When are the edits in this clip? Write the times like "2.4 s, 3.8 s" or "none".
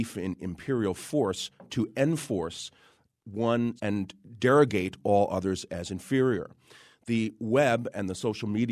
3.8 s